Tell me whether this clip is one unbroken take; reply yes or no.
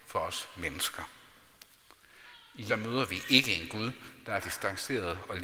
no